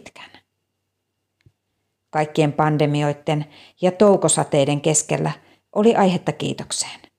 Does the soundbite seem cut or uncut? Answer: uncut